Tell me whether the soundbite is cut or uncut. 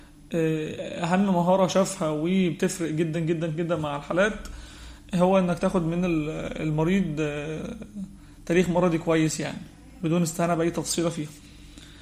uncut